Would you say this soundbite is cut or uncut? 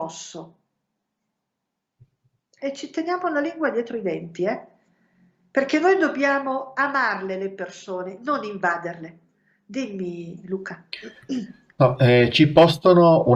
uncut